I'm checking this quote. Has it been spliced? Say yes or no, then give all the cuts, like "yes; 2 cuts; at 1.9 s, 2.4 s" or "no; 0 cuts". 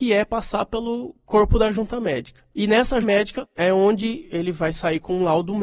yes; 1 cut; at 3.0 s